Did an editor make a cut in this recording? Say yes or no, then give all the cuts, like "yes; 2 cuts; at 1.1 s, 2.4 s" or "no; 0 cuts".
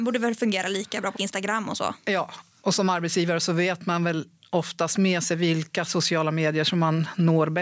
yes; 1 cut; at 1.1 s